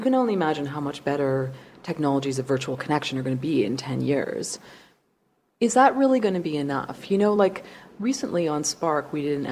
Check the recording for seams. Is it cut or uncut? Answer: uncut